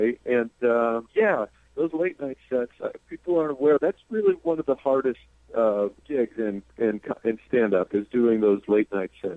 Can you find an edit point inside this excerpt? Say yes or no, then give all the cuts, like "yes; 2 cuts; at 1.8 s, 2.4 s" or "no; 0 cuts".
yes; 2 cuts; at 1.1 s, 3.8 s